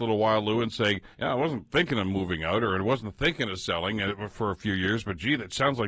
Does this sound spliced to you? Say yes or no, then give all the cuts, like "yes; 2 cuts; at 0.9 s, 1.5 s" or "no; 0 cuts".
yes; 1 cut; at 1.1 s